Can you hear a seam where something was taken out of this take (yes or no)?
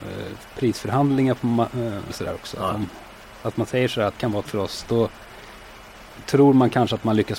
yes